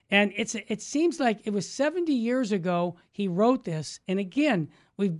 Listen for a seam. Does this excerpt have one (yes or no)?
no